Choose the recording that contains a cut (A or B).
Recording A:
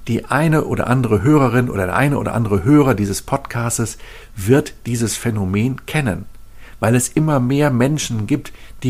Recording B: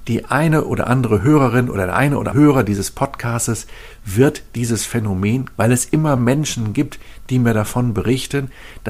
B